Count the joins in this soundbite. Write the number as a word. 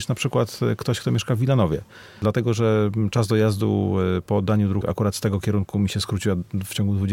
one